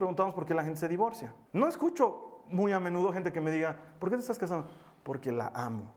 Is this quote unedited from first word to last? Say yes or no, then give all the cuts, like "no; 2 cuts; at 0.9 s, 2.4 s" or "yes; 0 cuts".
no; 1 cut; at 1.5 s